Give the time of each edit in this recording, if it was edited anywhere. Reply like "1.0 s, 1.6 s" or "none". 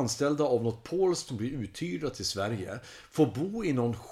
1.3 s